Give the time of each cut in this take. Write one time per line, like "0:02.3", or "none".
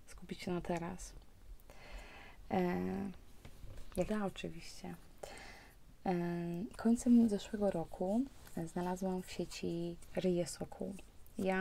0:04.1